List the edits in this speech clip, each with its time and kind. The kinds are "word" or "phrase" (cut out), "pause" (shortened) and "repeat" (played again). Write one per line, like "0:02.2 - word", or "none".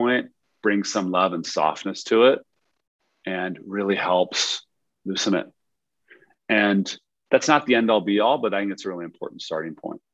none